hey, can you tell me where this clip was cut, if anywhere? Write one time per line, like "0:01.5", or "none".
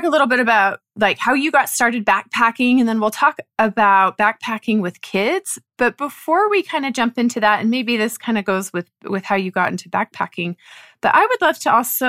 none